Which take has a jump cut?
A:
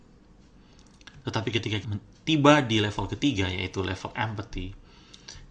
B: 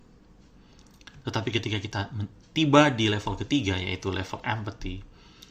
A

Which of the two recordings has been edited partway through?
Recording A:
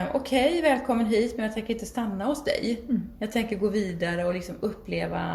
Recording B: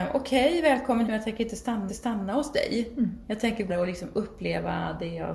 B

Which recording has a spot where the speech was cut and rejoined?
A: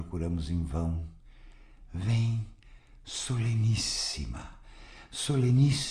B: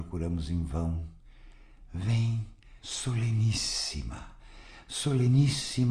B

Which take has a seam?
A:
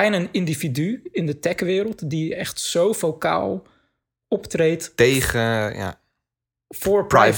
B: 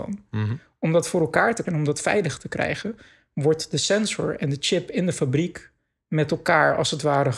B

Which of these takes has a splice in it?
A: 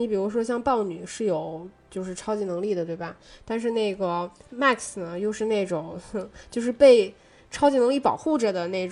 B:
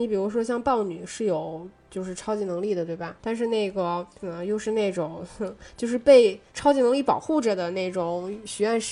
B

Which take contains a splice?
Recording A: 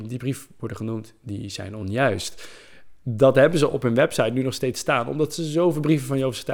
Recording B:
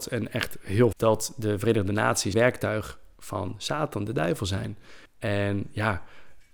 B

